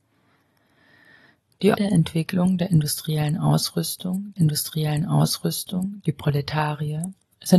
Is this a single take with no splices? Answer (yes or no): no